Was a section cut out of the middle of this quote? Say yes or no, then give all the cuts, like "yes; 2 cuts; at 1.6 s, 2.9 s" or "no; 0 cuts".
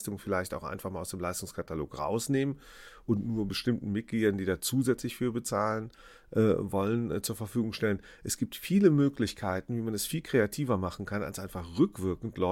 no; 0 cuts